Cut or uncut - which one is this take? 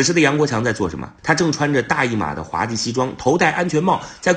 cut